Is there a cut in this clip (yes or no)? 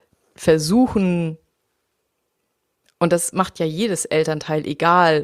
no